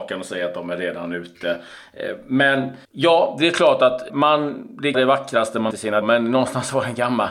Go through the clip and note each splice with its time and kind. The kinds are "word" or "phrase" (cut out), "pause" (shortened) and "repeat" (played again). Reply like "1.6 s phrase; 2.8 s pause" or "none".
2.8 s pause; 4.1 s word; 4.9 s phrase; 5.7 s phrase; 6.0 s word